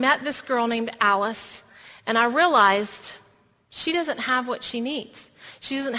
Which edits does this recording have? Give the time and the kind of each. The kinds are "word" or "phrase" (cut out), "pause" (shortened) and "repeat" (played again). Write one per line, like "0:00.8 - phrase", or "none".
none